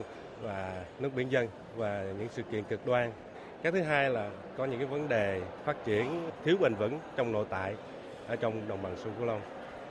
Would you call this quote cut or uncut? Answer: uncut